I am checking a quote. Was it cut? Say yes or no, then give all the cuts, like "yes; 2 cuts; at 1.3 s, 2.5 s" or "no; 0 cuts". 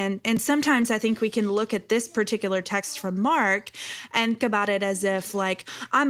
yes; 1 cut; at 4.4 s